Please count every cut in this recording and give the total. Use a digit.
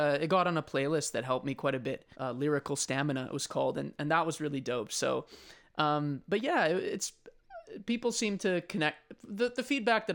1